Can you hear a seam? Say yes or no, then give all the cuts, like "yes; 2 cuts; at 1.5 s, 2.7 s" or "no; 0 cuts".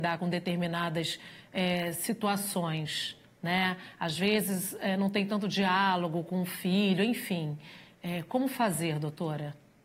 no; 0 cuts